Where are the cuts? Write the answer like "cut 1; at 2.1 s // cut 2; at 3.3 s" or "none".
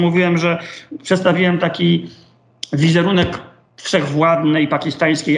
none